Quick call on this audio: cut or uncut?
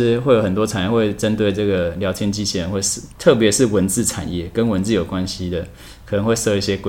cut